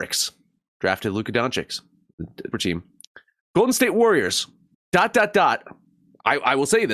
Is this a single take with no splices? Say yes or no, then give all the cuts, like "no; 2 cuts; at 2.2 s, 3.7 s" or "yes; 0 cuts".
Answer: no; 2 cuts; at 2.5 s, 4.7 s